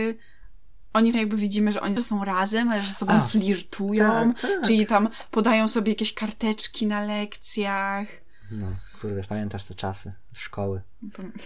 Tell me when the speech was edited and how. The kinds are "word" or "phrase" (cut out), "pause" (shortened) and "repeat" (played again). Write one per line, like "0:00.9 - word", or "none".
0:01.1 - word
0:02.0 - phrase